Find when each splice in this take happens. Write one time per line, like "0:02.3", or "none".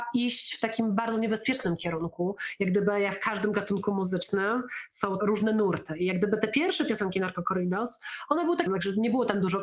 0:05.2
0:08.7

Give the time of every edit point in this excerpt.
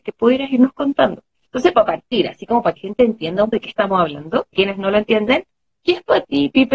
0:01.7
0:02.8
0:03.5
0:04.5
0:05.7

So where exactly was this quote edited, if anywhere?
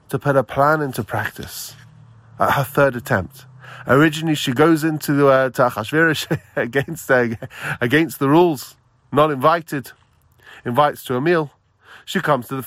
none

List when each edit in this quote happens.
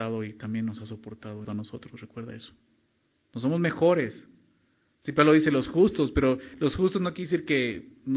0:01.4

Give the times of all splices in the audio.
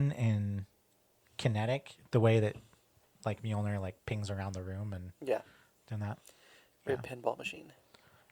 none

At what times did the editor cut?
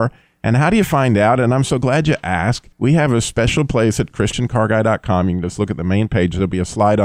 0:02.7

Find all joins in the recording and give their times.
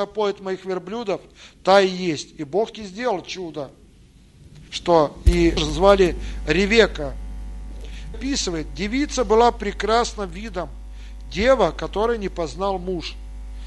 0:02.7
0:04.7
0:05.6
0:08.1

